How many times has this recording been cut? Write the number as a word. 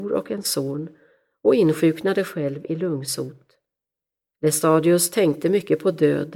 zero